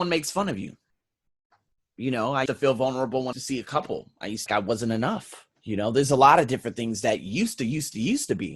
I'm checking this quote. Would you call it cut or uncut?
cut